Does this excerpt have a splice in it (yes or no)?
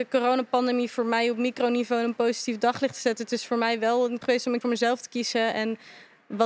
yes